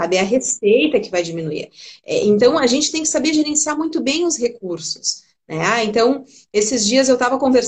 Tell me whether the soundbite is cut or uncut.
uncut